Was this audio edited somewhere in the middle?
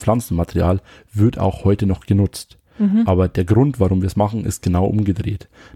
no; 0 cuts

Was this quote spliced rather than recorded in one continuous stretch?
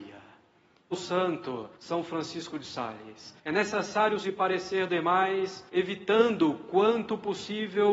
yes; 6 cuts; at 0.9 s, 1.7 s, 3.4 s, 4.2 s, 4.9 s, 5.7 s

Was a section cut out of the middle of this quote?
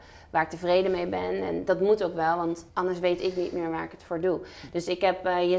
yes; 1 cut; at 2.7 s

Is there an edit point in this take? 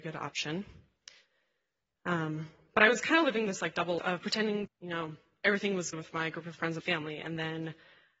yes; 4 cuts; at 4.0 s, 4.7 s, 5.9 s, 6.8 s

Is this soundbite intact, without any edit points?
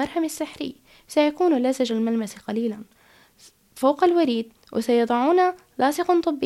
yes; 0 cuts

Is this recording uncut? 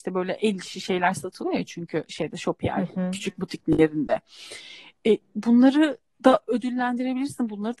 yes; 0 cuts

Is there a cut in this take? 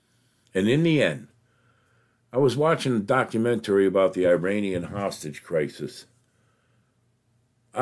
no; 0 cuts

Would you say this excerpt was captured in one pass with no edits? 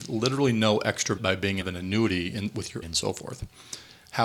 no; 3 cuts; at 1.2 s, 1.6 s, 2.8 s

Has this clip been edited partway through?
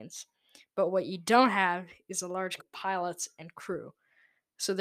yes; 1 cut; at 2.6 s

